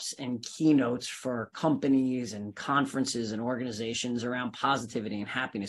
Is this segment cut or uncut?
uncut